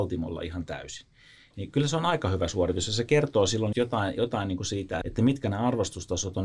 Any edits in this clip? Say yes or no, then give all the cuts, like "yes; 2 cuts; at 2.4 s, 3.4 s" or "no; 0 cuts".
yes; 2 cuts; at 3.7 s, 5.0 s